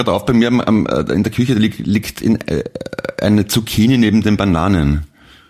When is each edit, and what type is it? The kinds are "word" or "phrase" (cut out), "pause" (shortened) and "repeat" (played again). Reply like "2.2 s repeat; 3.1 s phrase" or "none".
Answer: none